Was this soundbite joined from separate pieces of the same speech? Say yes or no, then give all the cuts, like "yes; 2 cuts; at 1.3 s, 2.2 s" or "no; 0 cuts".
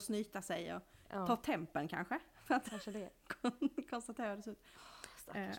no; 0 cuts